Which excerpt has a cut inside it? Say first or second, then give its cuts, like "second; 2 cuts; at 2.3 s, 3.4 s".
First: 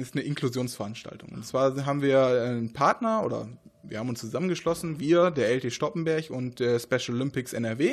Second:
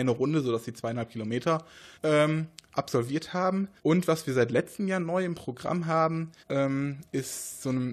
second; 3 cuts; at 1.9 s, 3.8 s, 6.4 s